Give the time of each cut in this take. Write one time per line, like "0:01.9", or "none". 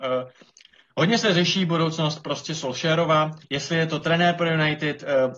0:03.4

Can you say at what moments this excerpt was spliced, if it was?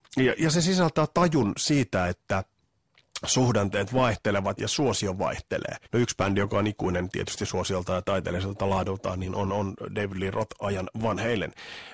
0:04.6
0:05.8

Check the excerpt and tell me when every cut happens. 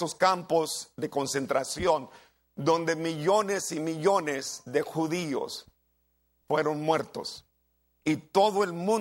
none

